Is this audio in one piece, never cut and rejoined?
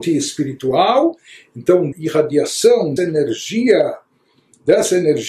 no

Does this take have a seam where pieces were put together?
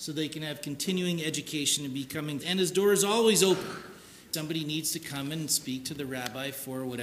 yes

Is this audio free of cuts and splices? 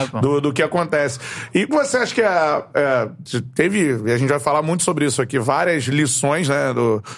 no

